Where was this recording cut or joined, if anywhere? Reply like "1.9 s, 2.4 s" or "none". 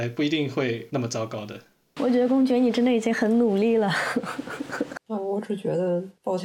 none